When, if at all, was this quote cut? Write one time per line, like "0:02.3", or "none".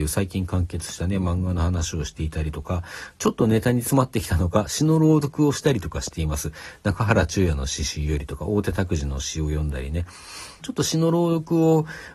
0:10.6